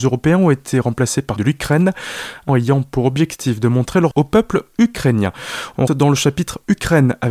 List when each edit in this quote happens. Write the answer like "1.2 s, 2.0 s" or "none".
1.4 s, 2.5 s, 4.1 s, 5.9 s

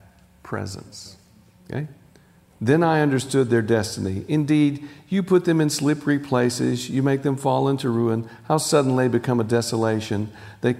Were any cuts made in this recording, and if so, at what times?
none

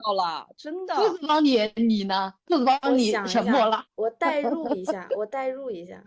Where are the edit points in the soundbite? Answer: 3.9 s

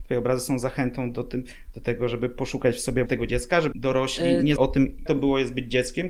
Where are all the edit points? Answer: 3.1 s, 3.7 s, 4.6 s, 5.1 s

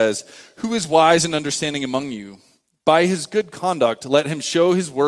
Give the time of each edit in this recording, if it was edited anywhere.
none

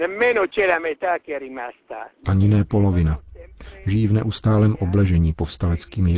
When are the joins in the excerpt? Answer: none

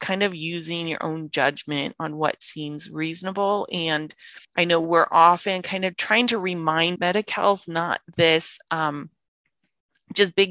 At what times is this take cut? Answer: 4.4 s, 5.9 s, 7.0 s

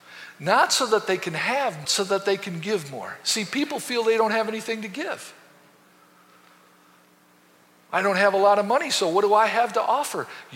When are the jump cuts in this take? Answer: 1.8 s

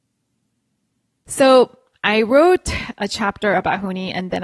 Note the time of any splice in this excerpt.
none

